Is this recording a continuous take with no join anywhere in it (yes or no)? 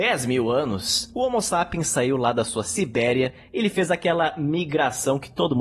yes